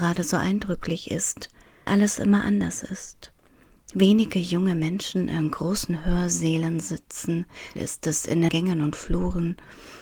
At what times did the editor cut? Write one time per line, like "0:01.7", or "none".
0:01.9
0:07.8
0:08.5